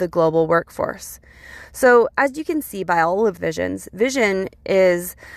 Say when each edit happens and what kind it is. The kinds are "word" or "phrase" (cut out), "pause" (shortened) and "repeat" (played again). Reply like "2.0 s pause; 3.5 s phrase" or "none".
3.4 s word